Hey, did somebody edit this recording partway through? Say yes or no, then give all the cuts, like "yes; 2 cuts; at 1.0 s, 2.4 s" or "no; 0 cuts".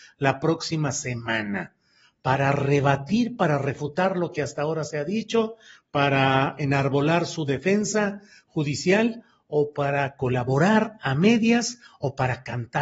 no; 0 cuts